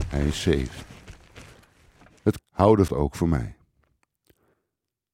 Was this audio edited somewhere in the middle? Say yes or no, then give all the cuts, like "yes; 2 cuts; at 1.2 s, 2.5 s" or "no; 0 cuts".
yes; 2 cuts; at 2.4 s, 2.9 s